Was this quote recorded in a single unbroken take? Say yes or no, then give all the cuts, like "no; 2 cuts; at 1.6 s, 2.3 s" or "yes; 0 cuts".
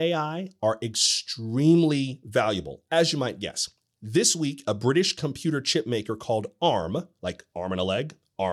yes; 0 cuts